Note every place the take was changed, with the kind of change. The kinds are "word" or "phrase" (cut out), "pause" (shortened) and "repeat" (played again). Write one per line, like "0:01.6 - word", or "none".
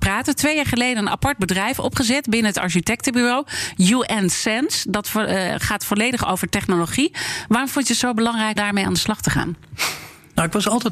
0:08.6 - word